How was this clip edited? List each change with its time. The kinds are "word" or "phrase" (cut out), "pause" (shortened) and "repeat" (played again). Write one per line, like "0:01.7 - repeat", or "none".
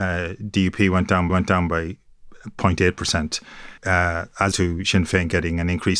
0:01.3 - repeat
0:03.8 - pause
0:04.5 - word